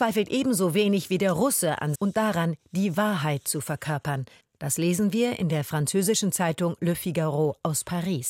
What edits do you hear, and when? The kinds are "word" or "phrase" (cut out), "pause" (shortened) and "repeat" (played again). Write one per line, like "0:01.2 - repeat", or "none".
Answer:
0:01.9 - phrase
0:04.4 - pause